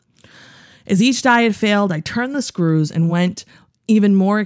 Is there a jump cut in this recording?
no; 0 cuts

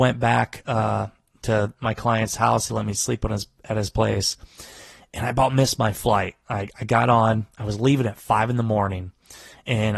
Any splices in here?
no; 0 cuts

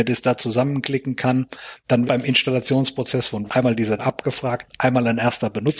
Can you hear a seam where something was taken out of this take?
yes; 3 cuts; at 2.0 s, 3.5 s, 4.0 s

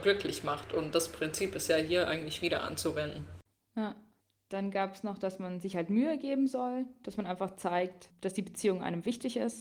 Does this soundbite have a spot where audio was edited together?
no; 0 cuts

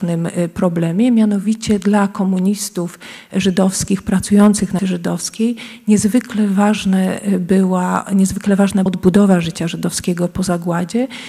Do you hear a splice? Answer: yes; 2 cuts; at 4.8 s, 8.9 s

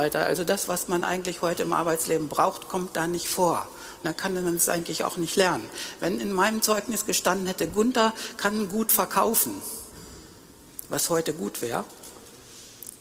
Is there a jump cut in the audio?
no; 0 cuts

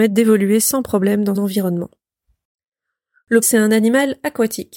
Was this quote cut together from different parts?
yes; 2 cuts; at 1.3 s, 3.4 s

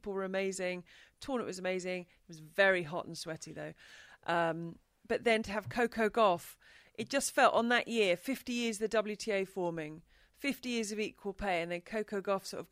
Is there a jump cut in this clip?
no; 0 cuts

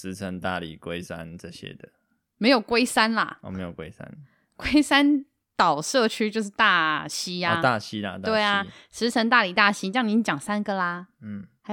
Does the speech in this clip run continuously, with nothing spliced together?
yes; 0 cuts

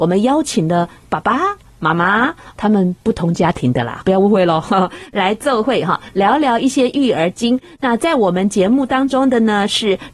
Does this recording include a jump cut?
yes; 1 cut; at 4.0 s

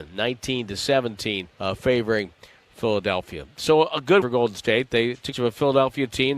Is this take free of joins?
no; 3 cuts; at 1.5 s, 4.2 s, 5.3 s

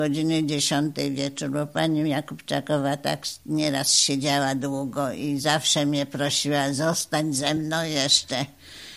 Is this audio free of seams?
yes; 0 cuts

